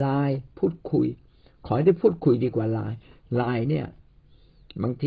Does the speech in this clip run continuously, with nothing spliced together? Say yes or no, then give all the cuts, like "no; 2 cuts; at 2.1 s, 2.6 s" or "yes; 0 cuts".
yes; 0 cuts